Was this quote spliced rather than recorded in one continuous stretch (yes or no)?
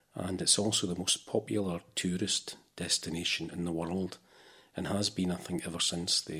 no